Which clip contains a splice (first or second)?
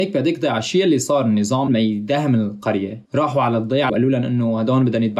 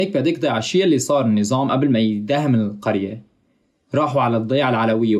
first